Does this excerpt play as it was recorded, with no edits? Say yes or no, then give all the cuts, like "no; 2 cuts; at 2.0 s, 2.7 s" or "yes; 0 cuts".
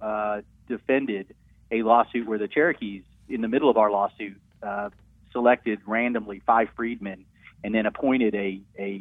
yes; 0 cuts